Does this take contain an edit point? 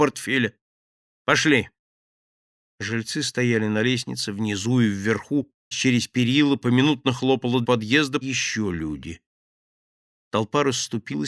yes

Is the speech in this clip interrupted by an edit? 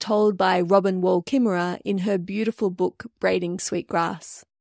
no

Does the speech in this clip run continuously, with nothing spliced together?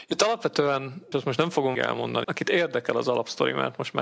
no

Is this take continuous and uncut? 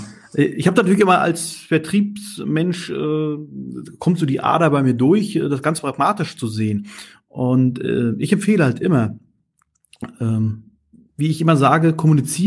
yes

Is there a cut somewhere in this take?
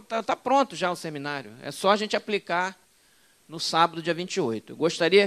no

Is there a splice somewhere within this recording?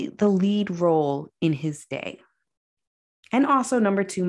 no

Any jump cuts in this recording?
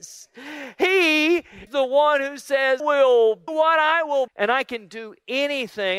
yes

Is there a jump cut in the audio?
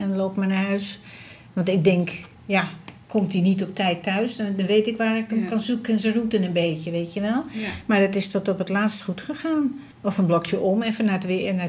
yes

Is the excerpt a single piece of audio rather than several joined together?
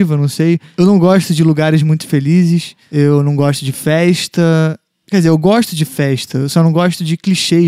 yes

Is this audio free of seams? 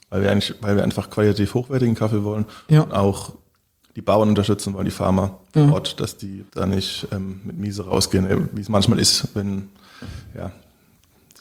no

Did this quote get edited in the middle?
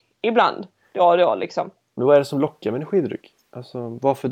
no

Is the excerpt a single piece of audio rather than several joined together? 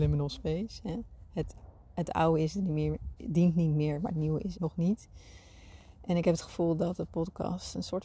no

